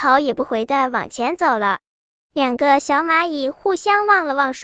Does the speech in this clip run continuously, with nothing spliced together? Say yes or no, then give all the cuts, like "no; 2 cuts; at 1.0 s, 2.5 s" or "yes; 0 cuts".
yes; 0 cuts